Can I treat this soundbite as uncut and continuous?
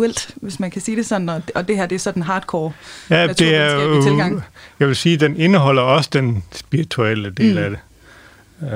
yes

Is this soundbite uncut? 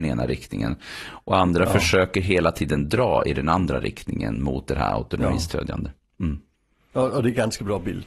yes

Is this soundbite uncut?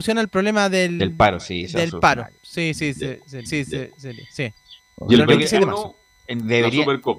no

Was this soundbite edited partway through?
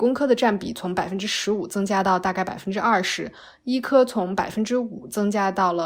no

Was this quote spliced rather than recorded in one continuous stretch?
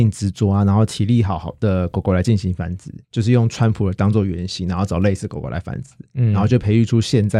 yes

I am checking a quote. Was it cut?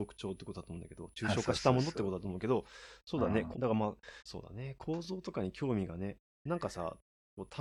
yes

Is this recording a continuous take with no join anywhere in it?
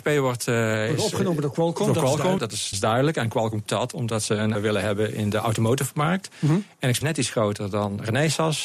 no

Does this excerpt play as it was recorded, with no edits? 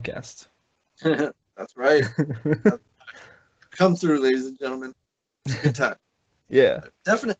yes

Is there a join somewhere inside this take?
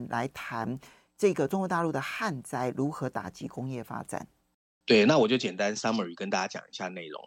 no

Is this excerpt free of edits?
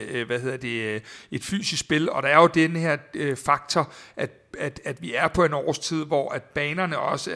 yes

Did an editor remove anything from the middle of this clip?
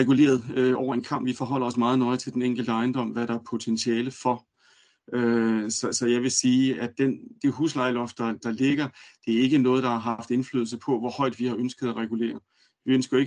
no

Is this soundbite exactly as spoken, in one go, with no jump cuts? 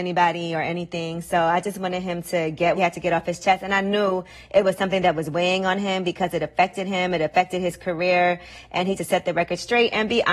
no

